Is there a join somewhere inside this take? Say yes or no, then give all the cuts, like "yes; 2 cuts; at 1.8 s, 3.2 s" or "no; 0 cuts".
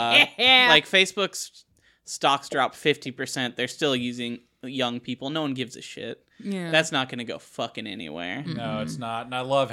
no; 0 cuts